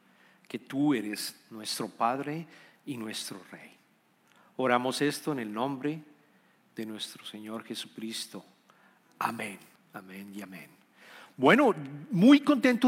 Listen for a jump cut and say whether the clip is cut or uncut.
cut